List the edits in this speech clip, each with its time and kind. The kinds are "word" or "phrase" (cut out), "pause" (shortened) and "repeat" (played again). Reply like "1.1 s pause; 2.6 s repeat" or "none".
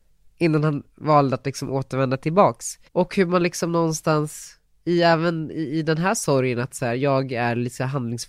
2.9 s pause